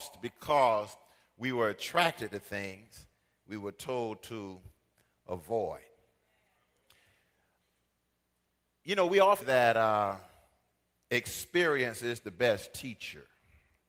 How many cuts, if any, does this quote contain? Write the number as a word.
one